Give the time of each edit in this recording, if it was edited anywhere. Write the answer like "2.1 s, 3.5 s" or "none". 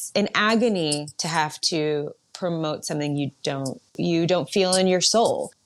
3.9 s